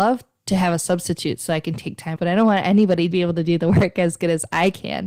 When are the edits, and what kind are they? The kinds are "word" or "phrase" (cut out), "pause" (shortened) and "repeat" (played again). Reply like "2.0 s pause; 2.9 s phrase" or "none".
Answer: 2.2 s word; 3.1 s word